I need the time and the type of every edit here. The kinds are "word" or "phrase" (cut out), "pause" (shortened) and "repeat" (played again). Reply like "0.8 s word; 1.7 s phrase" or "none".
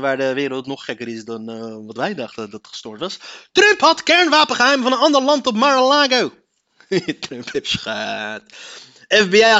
none